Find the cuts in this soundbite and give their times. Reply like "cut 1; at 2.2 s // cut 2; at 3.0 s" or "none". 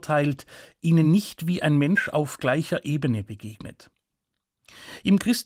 none